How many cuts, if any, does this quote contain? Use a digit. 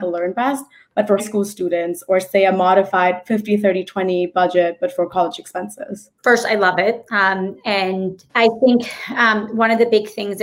3